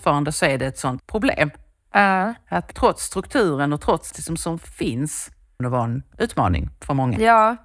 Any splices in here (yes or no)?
yes